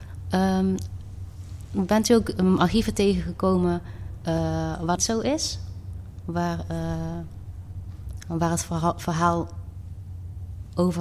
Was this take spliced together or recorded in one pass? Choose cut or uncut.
cut